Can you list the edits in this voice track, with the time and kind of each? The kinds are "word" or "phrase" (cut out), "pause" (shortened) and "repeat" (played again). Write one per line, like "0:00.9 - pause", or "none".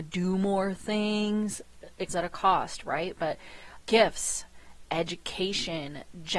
0:02.1 - word
0:03.8 - word